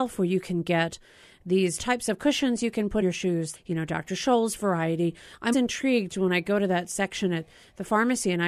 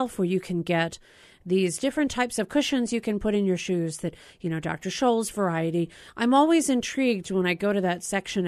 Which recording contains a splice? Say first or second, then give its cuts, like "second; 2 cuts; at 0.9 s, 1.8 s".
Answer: first; 4 cuts; at 1.8 s, 3.0 s, 3.5 s, 5.5 s